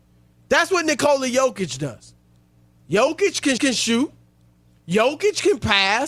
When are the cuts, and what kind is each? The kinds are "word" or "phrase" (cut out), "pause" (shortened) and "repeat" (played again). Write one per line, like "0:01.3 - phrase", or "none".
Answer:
0:03.6 - repeat